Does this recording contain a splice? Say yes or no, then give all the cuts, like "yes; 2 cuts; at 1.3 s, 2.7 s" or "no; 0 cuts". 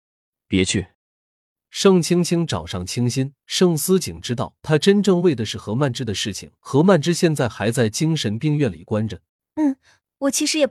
yes; 5 cuts; at 0.9 s, 3.4 s, 4.6 s, 6.6 s, 9.3 s